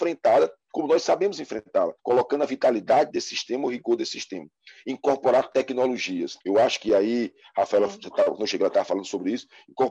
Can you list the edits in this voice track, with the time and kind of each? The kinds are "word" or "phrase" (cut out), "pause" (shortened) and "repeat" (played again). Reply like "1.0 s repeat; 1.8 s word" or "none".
2.0 s pause; 6.4 s pause